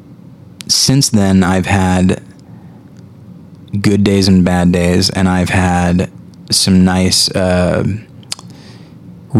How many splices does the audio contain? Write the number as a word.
zero